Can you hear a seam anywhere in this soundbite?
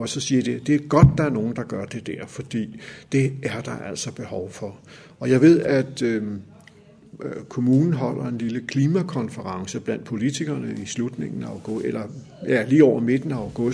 no; 0 cuts

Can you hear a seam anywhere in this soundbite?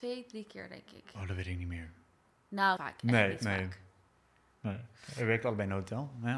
yes; 1 cut; at 2.8 s

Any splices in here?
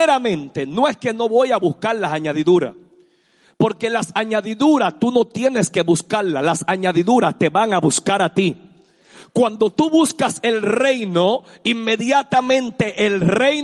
no; 0 cuts

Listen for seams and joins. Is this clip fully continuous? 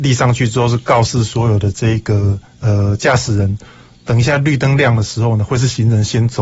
no; 1 cut; at 2.5 s

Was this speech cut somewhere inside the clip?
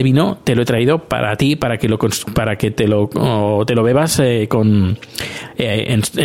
no; 0 cuts

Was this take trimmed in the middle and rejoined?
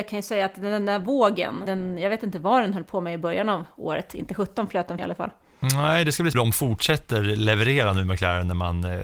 yes; 3 cuts; at 1.7 s, 5.0 s, 6.3 s

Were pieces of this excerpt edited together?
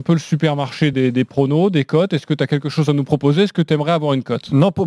no; 0 cuts

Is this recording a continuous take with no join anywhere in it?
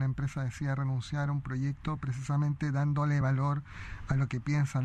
yes; 0 cuts

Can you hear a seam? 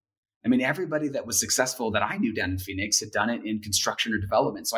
no; 0 cuts

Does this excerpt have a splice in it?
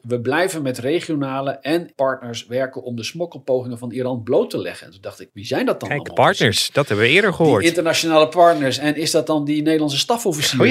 yes; 2 cuts; at 1.9 s, 5.3 s

